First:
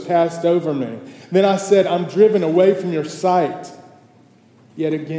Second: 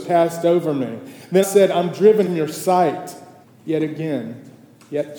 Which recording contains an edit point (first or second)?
second